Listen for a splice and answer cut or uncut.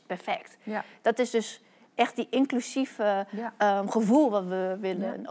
uncut